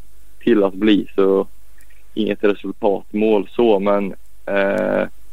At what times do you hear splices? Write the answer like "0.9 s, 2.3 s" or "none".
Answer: none